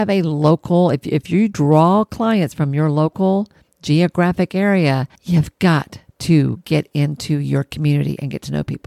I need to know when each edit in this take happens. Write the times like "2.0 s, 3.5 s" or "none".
3.6 s, 5.1 s